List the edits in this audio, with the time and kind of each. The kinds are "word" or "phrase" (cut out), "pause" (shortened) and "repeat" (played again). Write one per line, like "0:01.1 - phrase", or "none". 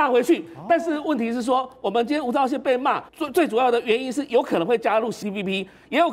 0:03.1 - pause
0:05.2 - word